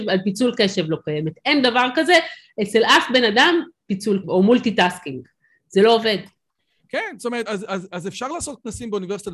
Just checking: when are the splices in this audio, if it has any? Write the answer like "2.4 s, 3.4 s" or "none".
4.2 s, 7.5 s